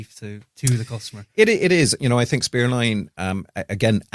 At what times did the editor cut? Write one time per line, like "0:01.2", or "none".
none